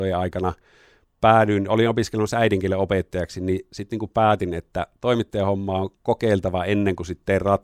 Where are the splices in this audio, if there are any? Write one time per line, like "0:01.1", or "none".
none